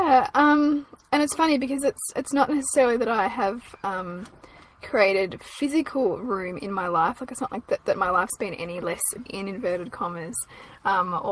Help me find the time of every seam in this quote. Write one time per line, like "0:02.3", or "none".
0:09.3